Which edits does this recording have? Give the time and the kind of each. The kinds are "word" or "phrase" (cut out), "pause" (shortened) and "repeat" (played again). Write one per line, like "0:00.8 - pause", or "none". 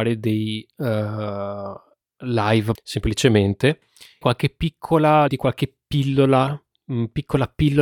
0:02.7 - word
0:04.2 - word
0:05.3 - word